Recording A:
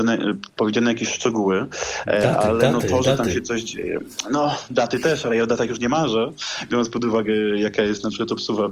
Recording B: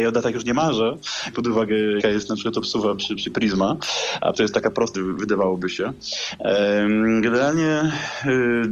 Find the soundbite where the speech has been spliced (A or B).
B